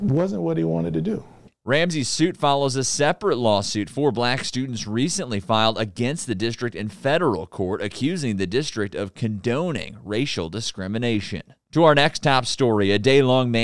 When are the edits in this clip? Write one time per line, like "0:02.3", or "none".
none